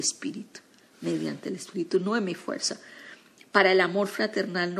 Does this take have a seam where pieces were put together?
no; 0 cuts

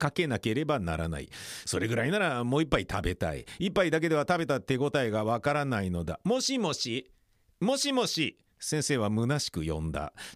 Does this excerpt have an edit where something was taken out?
no; 0 cuts

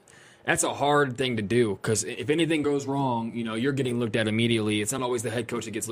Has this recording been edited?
no; 0 cuts

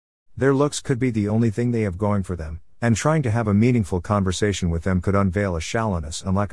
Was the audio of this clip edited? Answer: no; 0 cuts

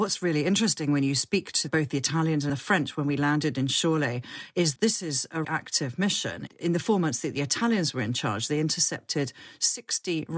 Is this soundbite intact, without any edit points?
no; 3 cuts; at 2.5 s, 4.8 s, 5.4 s

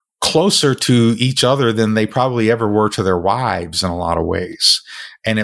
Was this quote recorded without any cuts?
yes; 0 cuts

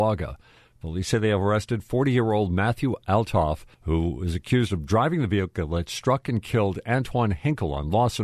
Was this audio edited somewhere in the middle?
yes; 1 cut; at 3.7 s

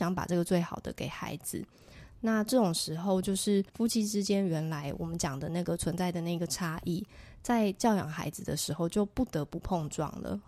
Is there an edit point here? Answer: yes; 1 cut; at 3.7 s

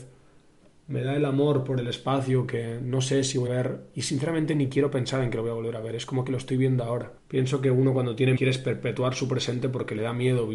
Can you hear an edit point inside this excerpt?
yes; 3 cuts; at 3.5 s, 7.2 s, 8.4 s

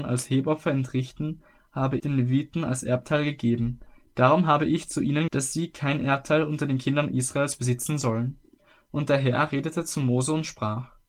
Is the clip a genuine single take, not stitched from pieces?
no; 2 cuts; at 2.0 s, 5.3 s

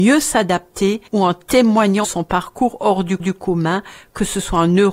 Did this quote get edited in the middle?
yes; 3 cuts; at 1.1 s, 2.0 s, 3.2 s

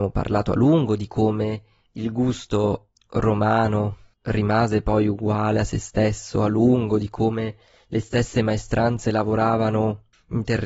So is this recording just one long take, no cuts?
no; 1 cut; at 4.1 s

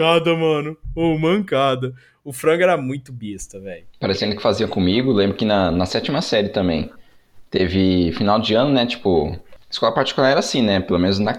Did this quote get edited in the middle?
no; 0 cuts

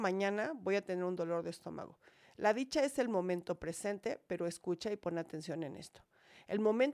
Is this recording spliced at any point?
no; 0 cuts

